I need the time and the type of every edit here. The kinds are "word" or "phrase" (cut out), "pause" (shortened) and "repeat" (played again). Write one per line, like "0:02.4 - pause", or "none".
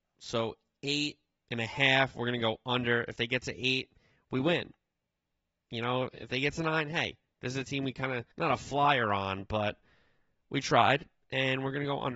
0:08.3 - pause